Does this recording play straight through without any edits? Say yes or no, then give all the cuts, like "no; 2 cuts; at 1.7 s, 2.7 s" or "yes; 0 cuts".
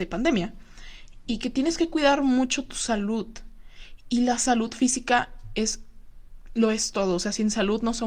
yes; 0 cuts